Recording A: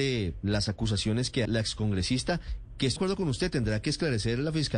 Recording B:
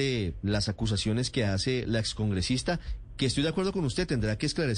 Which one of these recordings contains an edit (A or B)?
A